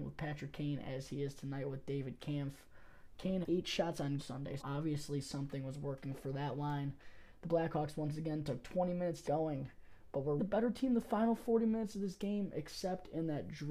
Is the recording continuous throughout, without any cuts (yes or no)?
no